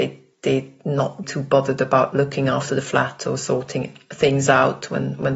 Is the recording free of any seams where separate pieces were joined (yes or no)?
no